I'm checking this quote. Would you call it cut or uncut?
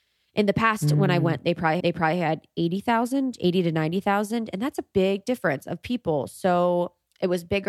cut